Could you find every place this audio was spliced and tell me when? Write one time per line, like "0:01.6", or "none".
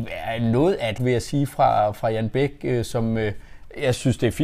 0:01.0